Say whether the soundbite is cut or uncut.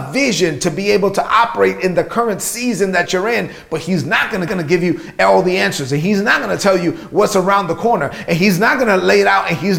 cut